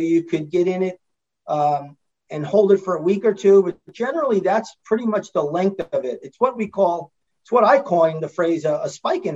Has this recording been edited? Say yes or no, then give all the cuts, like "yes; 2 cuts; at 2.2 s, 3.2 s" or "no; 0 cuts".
no; 0 cuts